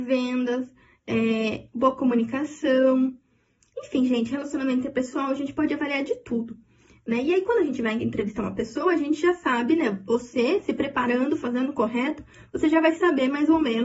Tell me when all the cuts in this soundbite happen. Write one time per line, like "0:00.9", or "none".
none